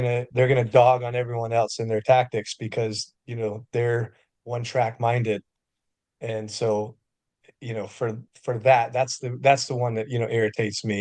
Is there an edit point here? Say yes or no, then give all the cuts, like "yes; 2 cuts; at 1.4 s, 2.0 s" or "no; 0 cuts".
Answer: no; 0 cuts